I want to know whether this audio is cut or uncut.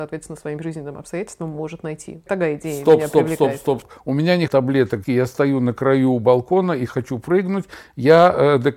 cut